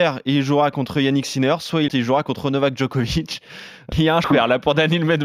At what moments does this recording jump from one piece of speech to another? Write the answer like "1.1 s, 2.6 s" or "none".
1.9 s, 3.9 s, 4.2 s